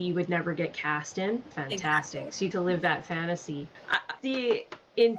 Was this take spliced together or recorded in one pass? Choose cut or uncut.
cut